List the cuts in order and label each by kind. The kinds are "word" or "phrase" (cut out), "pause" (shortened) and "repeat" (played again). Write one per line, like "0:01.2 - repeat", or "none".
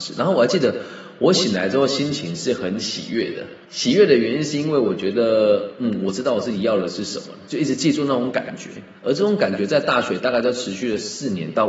0:03.6 - pause